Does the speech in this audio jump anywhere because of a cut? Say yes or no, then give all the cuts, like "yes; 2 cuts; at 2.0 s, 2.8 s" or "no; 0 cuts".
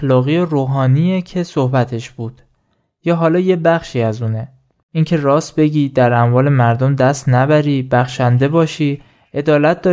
no; 0 cuts